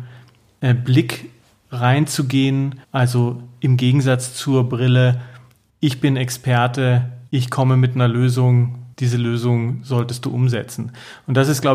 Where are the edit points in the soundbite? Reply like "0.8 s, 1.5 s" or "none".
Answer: 2.8 s, 7.3 s, 8.9 s